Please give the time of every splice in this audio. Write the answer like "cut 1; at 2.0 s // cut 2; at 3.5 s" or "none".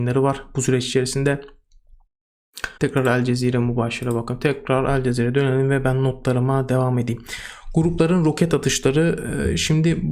cut 1; at 2.8 s